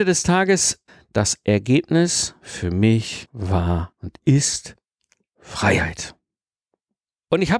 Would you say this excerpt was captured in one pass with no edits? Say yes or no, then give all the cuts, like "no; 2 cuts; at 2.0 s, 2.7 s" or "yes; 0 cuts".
yes; 0 cuts